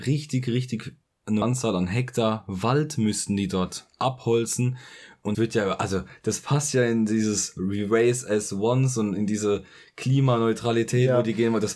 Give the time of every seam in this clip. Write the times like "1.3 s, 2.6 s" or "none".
1.4 s, 5.3 s